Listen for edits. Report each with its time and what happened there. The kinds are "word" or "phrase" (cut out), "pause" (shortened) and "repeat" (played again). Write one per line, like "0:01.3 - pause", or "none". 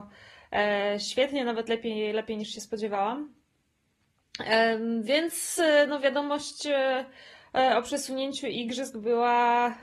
none